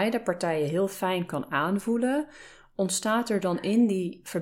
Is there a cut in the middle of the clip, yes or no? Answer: no